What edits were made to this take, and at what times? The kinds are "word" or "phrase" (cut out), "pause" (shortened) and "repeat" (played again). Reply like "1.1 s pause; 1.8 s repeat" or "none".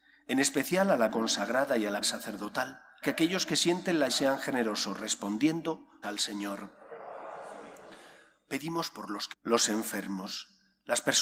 1.1 s word; 2.0 s word; 3.0 s word; 4.1 s word; 6.0 s word; 9.3 s word